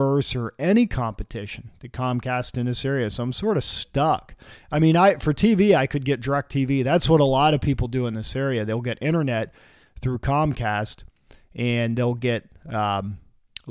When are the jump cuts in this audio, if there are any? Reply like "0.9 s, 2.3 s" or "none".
none